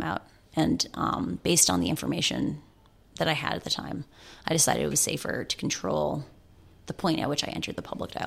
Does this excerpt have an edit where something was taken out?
no; 0 cuts

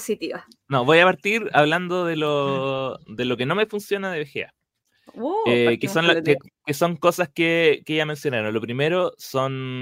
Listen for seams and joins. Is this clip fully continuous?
yes; 0 cuts

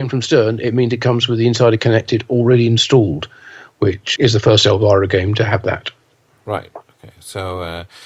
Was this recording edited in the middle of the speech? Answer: yes; 1 cut; at 4.2 s

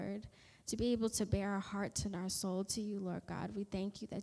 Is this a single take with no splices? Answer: yes; 0 cuts

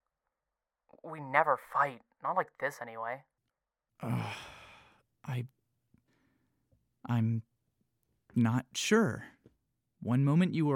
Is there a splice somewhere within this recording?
no; 0 cuts

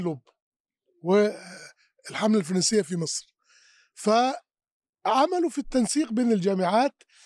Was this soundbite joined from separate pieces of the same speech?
no; 0 cuts

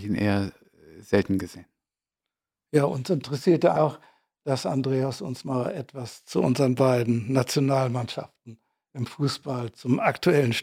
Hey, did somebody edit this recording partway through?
yes; 1 cut; at 3.8 s

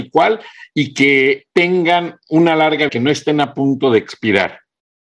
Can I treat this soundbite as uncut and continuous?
no; 2 cuts; at 1.5 s, 2.9 s

